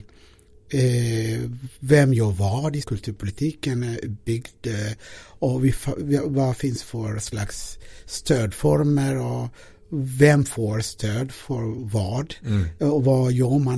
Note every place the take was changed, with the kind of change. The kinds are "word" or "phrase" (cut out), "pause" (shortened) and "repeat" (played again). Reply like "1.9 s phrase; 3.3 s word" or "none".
1.8 s pause; 2.8 s phrase